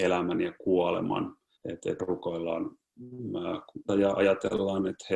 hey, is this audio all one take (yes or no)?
no